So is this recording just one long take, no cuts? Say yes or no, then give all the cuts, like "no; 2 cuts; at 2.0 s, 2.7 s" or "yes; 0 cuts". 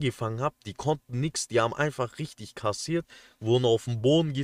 yes; 0 cuts